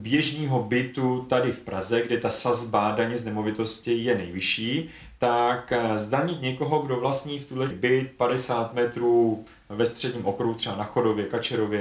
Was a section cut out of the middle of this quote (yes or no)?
yes